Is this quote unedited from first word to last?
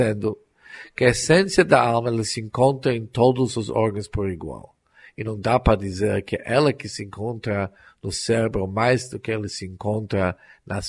yes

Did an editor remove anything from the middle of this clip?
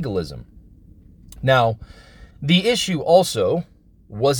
yes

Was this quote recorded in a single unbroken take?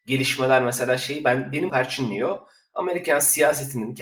no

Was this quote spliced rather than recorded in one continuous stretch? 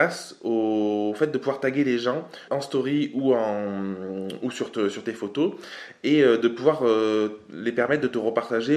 yes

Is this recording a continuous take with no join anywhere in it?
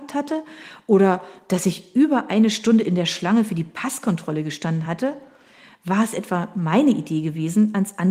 yes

